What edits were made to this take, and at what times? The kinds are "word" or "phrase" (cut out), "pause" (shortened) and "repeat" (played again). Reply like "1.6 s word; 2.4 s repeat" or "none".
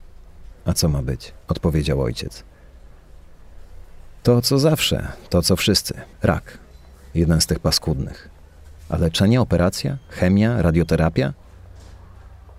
1.4 s pause; 4.2 s pause; 6.1 s pause; 8.8 s pause